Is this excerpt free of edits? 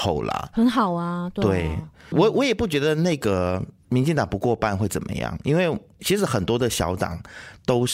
no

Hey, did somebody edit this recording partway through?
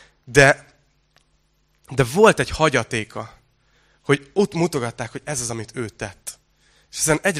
no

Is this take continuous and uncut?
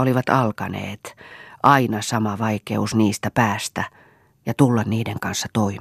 yes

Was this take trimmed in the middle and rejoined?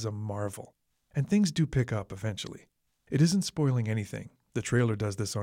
no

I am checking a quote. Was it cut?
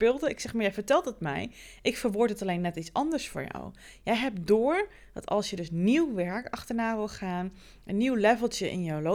no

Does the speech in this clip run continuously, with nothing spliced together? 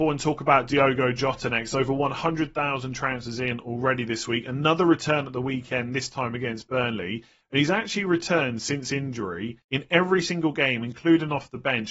no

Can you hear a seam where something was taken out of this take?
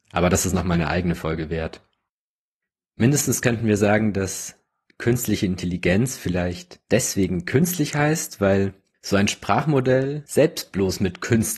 no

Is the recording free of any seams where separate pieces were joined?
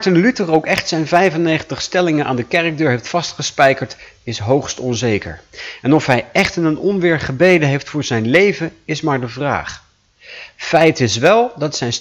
yes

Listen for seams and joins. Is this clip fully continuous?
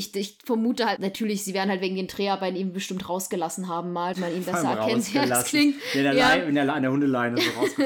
no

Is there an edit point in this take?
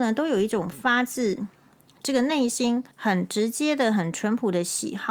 yes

